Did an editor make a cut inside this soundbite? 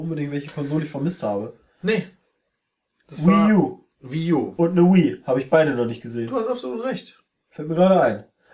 no; 0 cuts

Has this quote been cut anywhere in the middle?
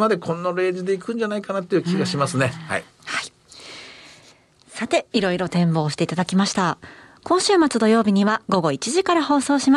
no; 0 cuts

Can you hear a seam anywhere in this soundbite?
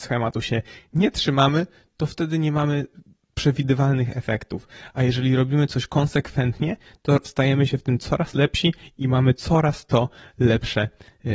no; 0 cuts

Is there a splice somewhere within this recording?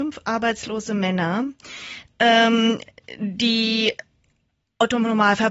no; 0 cuts

